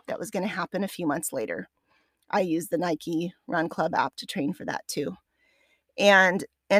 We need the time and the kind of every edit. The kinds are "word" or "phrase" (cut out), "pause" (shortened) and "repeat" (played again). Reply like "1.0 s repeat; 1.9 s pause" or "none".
none